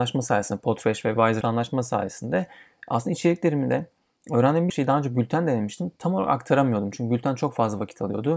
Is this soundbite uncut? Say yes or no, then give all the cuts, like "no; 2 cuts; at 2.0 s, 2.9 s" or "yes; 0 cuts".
no; 2 cuts; at 1.4 s, 4.7 s